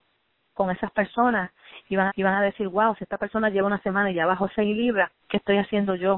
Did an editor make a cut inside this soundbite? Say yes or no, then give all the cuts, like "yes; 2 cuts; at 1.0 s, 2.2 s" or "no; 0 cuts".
yes; 2 cuts; at 2.1 s, 5.2 s